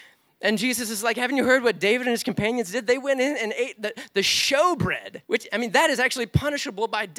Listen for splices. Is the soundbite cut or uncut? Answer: cut